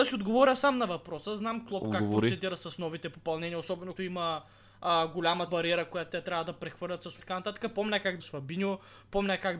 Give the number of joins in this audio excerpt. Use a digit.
4